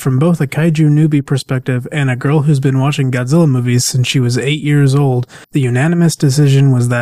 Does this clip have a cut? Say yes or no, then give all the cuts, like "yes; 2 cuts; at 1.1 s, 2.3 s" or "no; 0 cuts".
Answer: yes; 1 cut; at 5.4 s